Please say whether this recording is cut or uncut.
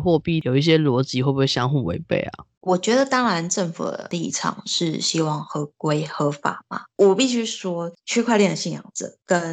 cut